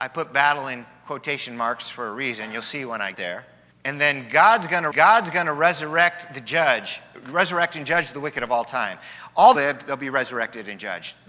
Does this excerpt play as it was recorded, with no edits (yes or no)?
no